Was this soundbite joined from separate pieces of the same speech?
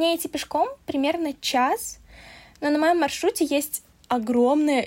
no; 0 cuts

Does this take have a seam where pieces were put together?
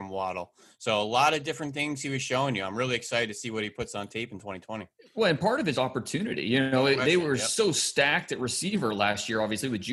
yes; 1 cut; at 5.7 s

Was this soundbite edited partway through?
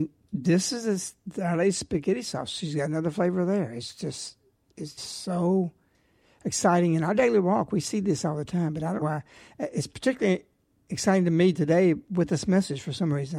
yes; 2 cuts; at 5.0 s, 9.0 s

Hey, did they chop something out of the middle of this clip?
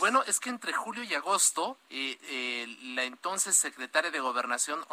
no; 0 cuts

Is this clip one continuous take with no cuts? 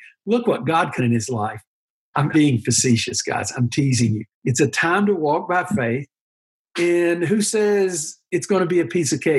no; 4 cuts; at 1.0 s, 2.3 s, 4.3 s, 6.2 s

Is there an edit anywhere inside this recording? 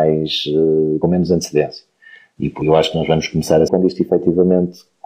yes; 3 cuts; at 1.0 s, 2.6 s, 3.7 s

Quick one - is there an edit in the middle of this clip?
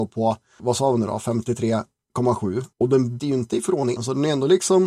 yes; 3 cuts; at 2.7 s, 3.2 s, 4.0 s

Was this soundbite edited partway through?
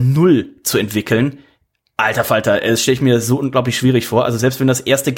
no; 0 cuts

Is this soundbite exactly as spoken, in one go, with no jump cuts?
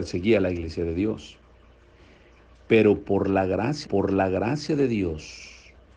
no; 1 cut; at 3.8 s

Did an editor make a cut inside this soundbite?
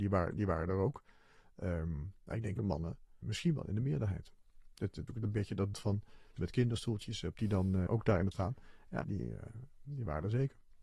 yes; 9 cuts; at 2.6 s, 3.2 s, 5.1 s, 5.7 s, 6.4 s, 7.4 s, 7.9 s, 8.3 s, 9.0 s

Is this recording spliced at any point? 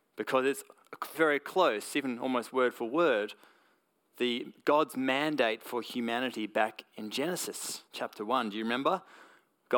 yes; 2 cuts; at 1.1 s, 7.9 s

